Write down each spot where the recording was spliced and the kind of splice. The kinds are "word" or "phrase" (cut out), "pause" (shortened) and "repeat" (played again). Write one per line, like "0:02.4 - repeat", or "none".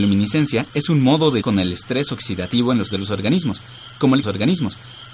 0:01.4 - word
0:02.9 - word
0:04.2 - repeat